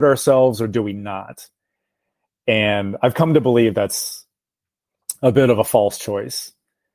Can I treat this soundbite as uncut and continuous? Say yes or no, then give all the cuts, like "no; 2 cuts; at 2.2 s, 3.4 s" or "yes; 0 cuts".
yes; 0 cuts